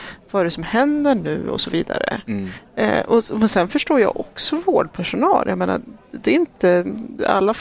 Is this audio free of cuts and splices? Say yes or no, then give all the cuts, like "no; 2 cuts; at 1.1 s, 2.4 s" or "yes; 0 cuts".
yes; 0 cuts